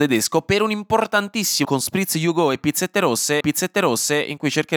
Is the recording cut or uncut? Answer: cut